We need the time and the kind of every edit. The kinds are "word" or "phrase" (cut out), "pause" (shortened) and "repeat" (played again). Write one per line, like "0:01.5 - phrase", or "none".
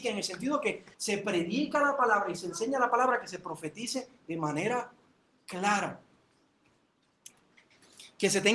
0:00.9 - pause